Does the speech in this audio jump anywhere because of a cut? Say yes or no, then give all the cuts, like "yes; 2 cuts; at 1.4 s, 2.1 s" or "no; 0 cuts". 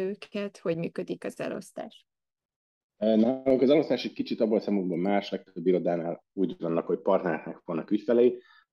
no; 0 cuts